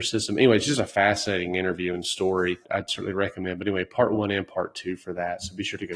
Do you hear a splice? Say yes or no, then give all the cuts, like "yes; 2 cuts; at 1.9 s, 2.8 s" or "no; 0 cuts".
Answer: yes; 1 cut; at 2.6 s